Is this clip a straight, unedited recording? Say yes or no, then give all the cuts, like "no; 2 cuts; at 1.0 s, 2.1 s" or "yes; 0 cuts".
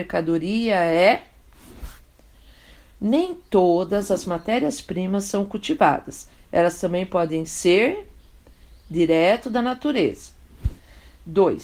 yes; 0 cuts